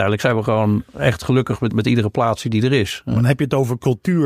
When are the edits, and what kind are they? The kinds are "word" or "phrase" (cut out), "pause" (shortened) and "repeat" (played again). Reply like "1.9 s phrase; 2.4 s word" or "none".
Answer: 1.7 s word